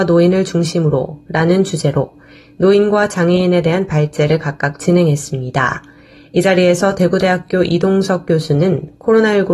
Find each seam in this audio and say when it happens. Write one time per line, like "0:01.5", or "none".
none